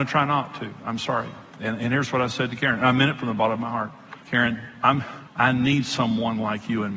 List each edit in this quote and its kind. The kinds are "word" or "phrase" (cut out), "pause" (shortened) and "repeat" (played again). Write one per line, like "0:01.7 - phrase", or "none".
0:01.5 - pause
0:04.2 - pause
0:05.3 - pause